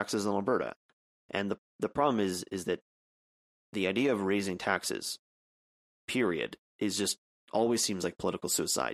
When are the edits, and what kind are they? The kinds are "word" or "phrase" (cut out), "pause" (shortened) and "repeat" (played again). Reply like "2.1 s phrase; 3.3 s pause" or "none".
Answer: none